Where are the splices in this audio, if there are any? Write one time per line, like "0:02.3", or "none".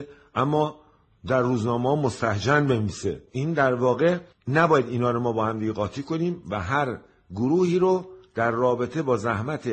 none